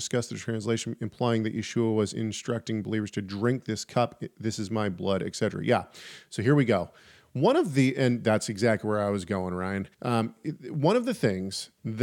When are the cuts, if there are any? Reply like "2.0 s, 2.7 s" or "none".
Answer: 9.9 s